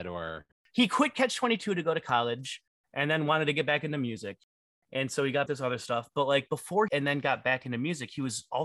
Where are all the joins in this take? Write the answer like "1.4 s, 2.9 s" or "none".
5.5 s, 6.9 s